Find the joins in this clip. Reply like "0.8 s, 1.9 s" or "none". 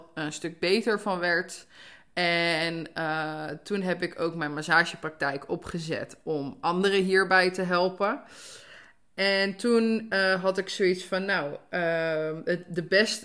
none